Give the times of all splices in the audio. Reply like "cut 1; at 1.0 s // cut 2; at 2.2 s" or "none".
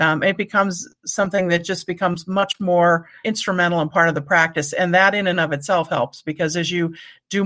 none